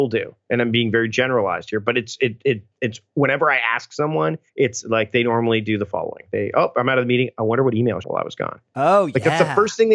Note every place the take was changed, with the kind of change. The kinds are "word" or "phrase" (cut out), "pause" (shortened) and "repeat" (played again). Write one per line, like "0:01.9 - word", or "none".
0:02.7 - pause
0:04.5 - pause
0:08.0 - phrase